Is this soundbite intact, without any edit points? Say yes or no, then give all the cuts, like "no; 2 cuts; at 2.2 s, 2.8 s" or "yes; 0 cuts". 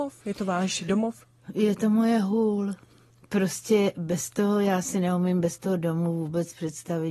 yes; 0 cuts